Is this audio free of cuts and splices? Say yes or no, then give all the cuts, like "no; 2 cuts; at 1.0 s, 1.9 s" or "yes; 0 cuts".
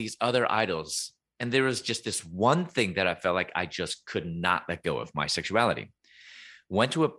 yes; 0 cuts